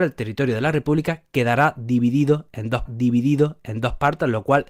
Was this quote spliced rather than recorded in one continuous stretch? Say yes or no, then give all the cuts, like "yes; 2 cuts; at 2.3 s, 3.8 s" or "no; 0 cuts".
yes; 1 cut; at 2.9 s